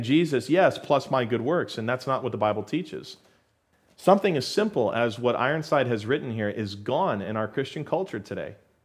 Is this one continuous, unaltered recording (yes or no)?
yes